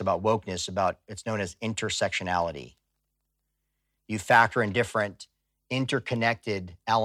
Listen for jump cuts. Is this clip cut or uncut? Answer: uncut